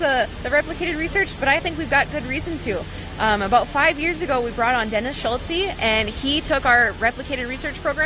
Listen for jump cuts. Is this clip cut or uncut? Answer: cut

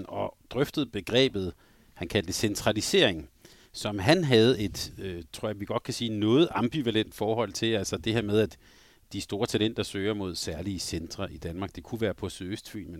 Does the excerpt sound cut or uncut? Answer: uncut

